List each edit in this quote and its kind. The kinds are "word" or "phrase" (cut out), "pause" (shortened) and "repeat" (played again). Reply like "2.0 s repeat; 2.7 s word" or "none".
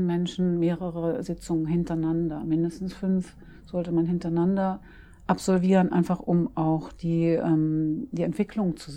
none